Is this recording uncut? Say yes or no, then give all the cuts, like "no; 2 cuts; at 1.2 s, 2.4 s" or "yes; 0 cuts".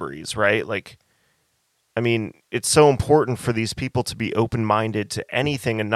yes; 0 cuts